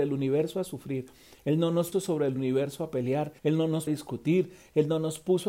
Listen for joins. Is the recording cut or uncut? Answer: cut